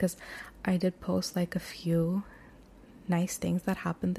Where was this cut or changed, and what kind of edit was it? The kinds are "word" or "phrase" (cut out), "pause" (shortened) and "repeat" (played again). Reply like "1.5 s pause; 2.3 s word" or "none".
none